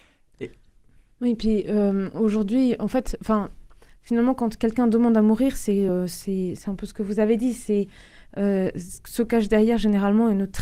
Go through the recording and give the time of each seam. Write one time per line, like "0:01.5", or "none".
none

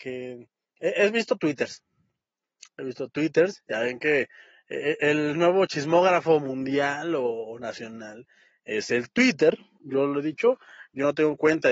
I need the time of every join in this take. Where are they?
0:09.8

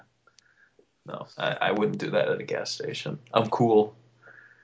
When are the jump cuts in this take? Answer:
0:01.3

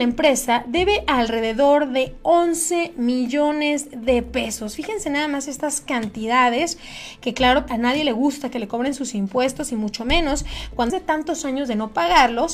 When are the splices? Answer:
0:07.7
0:10.9

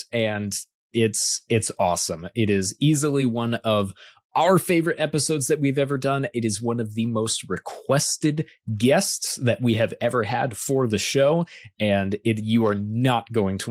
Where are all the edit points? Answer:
none

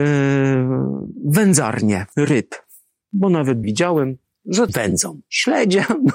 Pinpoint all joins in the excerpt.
0:02.1
0:03.6
0:04.7

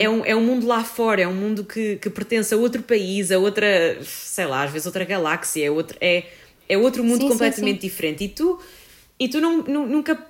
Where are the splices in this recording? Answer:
none

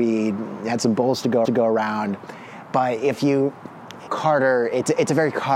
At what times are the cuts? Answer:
0:01.4
0:04.1

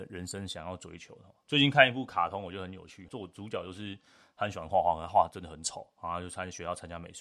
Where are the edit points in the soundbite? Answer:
0:03.1

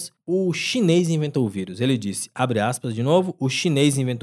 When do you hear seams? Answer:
none

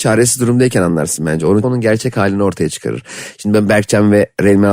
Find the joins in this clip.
0:01.6

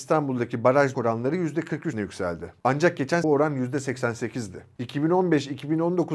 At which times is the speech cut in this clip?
0:00.9
0:01.9
0:03.2

